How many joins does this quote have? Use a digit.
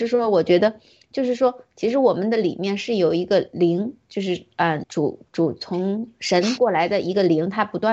1